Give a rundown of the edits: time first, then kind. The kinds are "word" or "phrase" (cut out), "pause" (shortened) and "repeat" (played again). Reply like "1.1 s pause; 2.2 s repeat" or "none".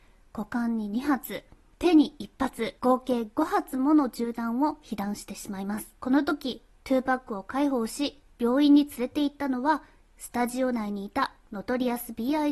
2.8 s pause; 6.0 s pause

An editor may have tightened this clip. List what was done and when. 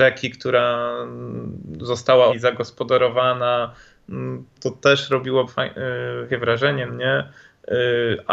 2.3 s word; 4.5 s word; 5.5 s word; 6.3 s word; 6.9 s word

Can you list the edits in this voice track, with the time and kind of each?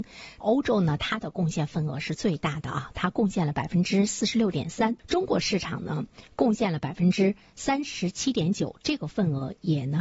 5.0 s pause

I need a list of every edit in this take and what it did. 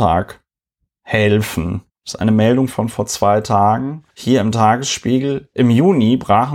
1.9 s pause; 4.1 s pause

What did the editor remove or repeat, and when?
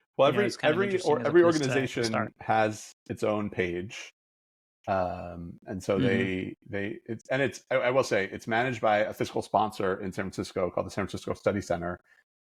none

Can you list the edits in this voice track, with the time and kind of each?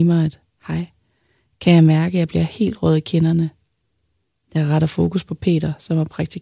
none

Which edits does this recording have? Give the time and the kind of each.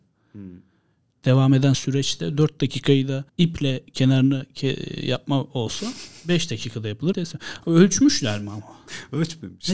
1.0 s pause; 3.3 s pause; 7.1 s word

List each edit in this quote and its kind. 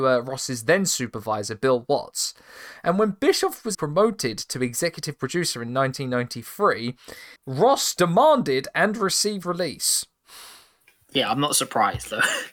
3.7 s word; 7.4 s pause; 9.4 s word

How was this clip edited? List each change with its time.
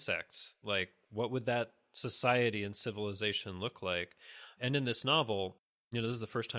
4.6 s word

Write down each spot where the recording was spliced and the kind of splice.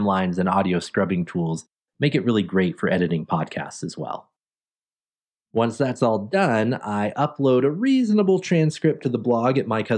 none

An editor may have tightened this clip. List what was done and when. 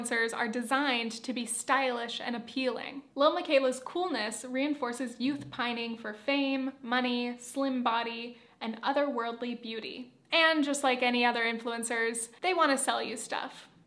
none

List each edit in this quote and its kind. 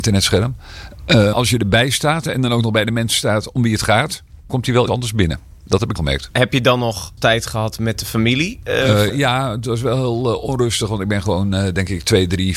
1.3 s word; 4.5 s word; 4.9 s word; 6.0 s word; 7.2 s word; 9.1 s word

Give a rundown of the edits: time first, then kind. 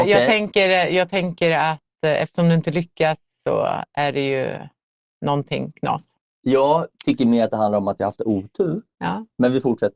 none

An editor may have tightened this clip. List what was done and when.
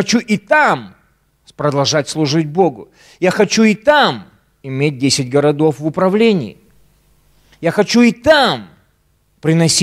none

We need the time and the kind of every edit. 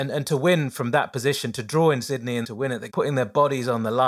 2.4 s word; 2.9 s phrase

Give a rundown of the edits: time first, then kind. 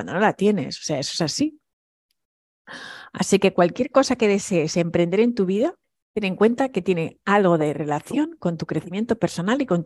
5.8 s pause

